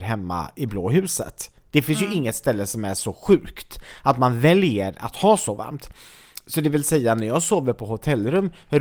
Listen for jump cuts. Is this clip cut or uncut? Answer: uncut